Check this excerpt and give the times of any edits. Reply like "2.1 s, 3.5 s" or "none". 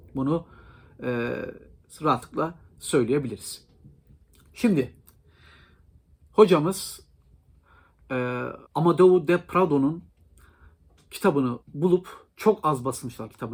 8.7 s, 11.6 s